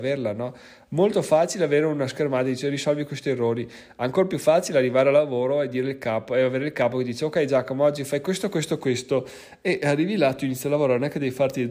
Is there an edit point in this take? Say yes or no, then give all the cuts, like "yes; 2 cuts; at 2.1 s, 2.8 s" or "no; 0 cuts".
no; 0 cuts